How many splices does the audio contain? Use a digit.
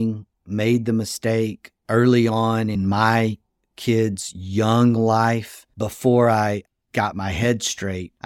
0